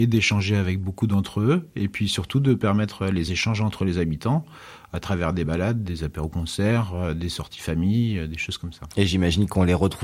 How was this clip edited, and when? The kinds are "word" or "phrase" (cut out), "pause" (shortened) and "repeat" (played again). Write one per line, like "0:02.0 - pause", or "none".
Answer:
none